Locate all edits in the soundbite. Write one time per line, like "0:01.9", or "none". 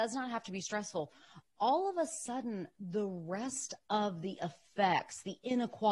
none